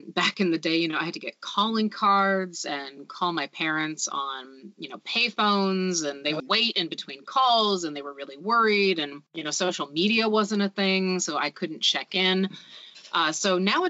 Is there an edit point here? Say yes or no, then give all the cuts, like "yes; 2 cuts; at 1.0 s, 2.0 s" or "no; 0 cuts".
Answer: yes; 2 cuts; at 6.4 s, 9.3 s